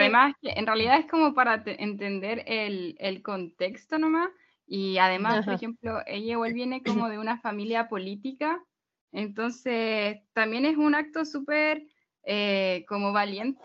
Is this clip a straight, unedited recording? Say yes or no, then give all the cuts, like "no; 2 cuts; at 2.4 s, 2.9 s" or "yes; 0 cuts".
yes; 0 cuts